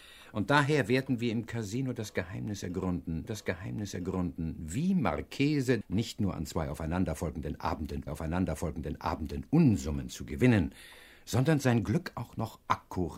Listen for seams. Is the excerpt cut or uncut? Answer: cut